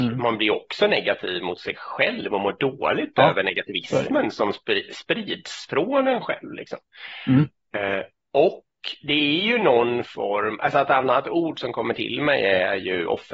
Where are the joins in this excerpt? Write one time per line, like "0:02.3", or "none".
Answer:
none